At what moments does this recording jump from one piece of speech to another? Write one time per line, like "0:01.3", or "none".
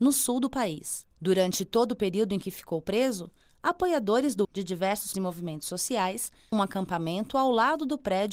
0:01.1
0:04.4
0:05.1
0:06.5